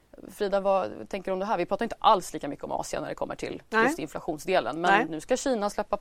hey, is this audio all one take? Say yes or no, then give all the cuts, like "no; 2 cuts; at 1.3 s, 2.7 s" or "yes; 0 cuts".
yes; 0 cuts